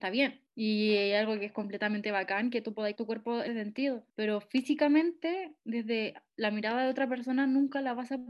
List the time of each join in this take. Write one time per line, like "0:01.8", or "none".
0:02.9
0:03.5
0:06.3